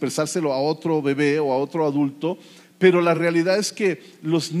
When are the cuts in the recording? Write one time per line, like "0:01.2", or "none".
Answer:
none